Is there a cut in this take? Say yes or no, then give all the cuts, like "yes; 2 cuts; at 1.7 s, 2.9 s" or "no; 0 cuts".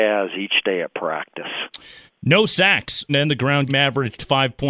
yes; 3 cuts; at 2.1 s, 3.1 s, 3.7 s